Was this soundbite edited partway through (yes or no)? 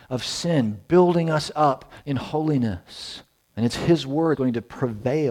yes